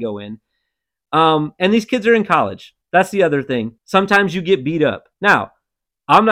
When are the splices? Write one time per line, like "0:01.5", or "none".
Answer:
0:02.8
0:03.8
0:05.1

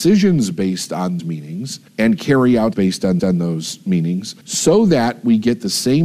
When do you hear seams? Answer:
0:01.2
0:01.9
0:02.7
0:03.2
0:04.4

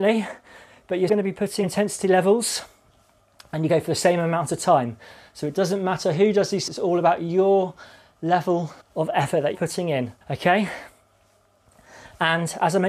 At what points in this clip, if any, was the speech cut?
0:01.1
0:01.6
0:03.7
0:06.7
0:08.8
0:09.5
0:10.2

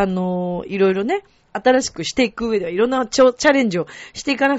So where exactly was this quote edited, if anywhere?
none

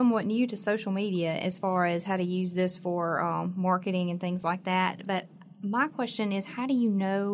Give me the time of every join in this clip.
none

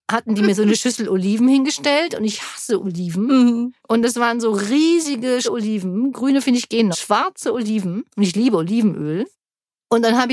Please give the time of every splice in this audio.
0:03.8
0:05.4
0:06.9
0:08.1

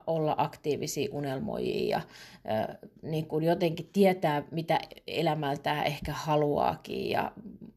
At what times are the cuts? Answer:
0:03.0

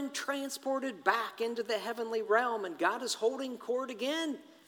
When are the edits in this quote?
none

